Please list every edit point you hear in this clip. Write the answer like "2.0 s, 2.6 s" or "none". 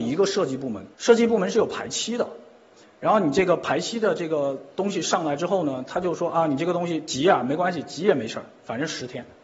0.9 s

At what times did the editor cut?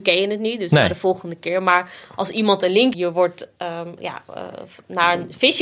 2.9 s, 4.0 s

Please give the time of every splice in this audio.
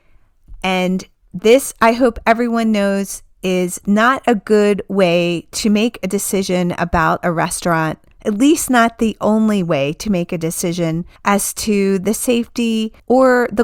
none

